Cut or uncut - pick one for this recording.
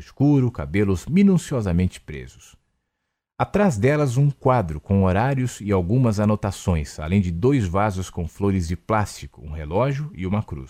uncut